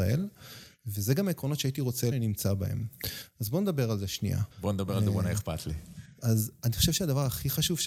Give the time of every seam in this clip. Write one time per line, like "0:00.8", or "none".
0:02.1
0:04.5